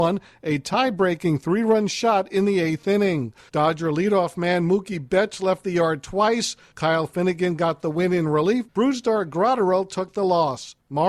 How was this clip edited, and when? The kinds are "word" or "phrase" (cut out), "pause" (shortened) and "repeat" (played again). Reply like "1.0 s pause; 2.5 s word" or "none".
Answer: 8.7 s pause